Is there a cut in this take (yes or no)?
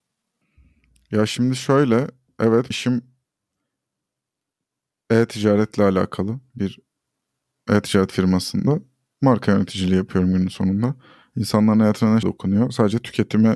yes